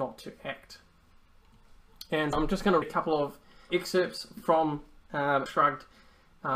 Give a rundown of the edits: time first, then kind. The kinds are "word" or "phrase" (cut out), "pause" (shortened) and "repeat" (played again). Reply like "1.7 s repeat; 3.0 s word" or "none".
2.3 s word; 2.8 s word; 3.7 s word; 5.5 s word

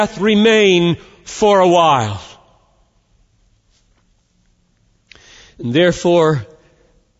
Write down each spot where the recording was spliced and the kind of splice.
none

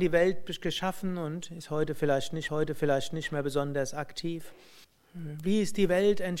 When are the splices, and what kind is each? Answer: 2.5 s repeat; 4.8 s pause

